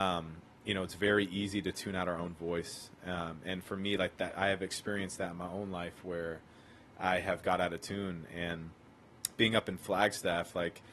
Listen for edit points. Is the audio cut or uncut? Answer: uncut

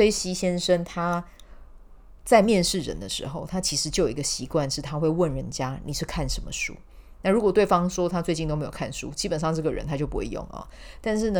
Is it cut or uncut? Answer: cut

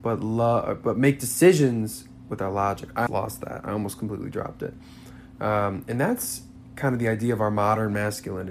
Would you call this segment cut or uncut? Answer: cut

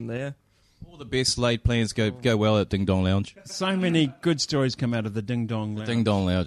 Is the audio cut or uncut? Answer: uncut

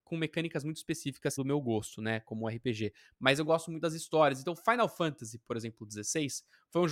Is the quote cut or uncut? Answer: cut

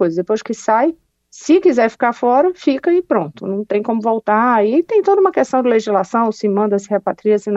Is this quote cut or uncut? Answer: uncut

